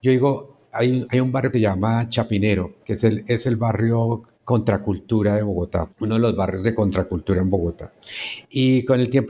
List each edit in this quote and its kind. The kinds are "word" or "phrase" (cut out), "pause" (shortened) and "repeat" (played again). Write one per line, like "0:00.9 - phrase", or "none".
0:01.5 - word
0:02.8 - pause
0:04.3 - pause
0:05.9 - pause